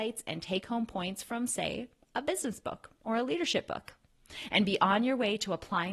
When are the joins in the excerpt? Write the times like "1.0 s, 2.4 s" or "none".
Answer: none

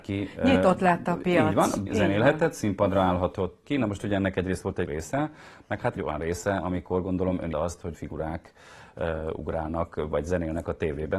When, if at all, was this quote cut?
1.9 s, 3.6 s, 4.9 s, 6.0 s, 7.5 s, 7.9 s

